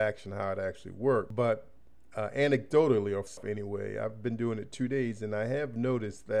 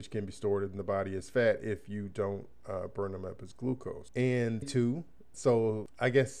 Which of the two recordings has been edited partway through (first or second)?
second